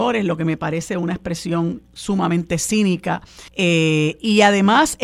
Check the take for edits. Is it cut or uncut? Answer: cut